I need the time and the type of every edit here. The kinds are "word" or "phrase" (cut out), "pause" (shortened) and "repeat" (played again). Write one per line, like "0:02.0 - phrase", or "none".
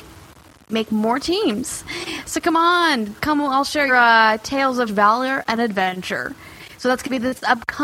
0:03.2 - pause
0:03.9 - word
0:04.9 - word